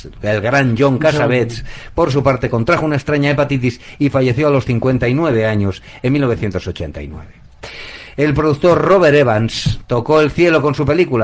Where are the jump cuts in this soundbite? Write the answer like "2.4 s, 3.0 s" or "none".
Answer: none